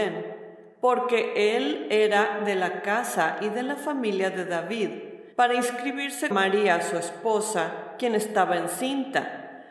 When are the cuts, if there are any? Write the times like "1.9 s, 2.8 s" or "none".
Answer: 5.3 s, 6.3 s